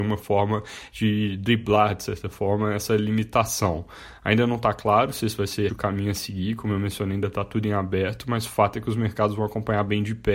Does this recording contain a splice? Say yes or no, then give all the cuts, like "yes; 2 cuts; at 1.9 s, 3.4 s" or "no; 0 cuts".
yes; 1 cut; at 5.7 s